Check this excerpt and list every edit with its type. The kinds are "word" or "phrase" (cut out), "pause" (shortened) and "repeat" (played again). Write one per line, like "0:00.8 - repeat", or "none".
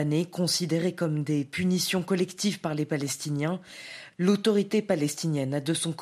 none